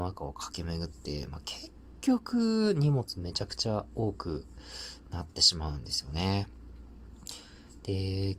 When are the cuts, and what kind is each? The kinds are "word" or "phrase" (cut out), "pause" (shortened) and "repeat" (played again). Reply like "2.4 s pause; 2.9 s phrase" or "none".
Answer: none